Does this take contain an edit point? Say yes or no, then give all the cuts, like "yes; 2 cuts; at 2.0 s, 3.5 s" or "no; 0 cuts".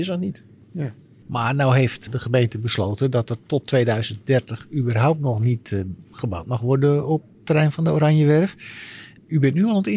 no; 0 cuts